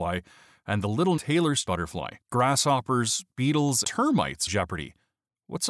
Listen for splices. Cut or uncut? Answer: cut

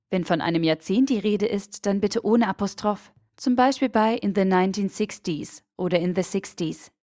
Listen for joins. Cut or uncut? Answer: uncut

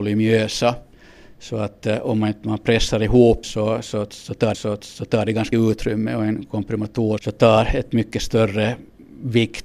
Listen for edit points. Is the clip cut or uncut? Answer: cut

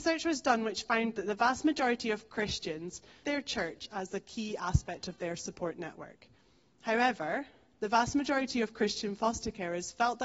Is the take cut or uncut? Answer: cut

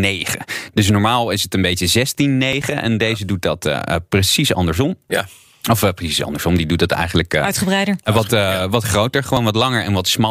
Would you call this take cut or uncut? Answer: uncut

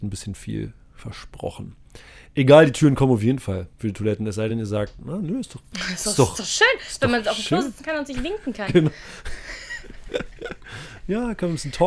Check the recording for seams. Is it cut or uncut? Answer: uncut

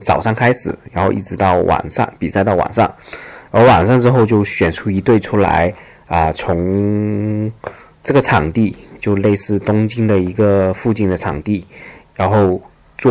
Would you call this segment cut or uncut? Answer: uncut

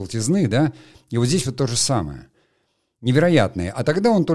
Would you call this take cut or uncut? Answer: uncut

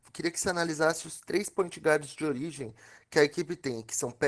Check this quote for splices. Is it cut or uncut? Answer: uncut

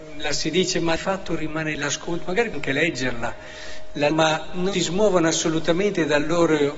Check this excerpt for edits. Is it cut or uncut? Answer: cut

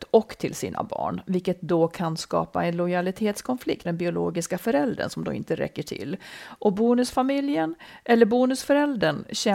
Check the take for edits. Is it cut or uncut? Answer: cut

